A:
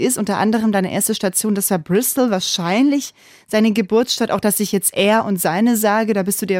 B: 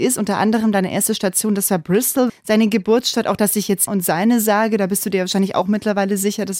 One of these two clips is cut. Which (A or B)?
B